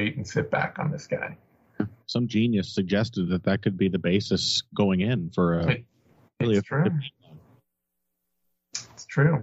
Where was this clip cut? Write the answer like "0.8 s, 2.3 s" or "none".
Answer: none